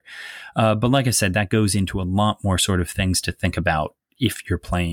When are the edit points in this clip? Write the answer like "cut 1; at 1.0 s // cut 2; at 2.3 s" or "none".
none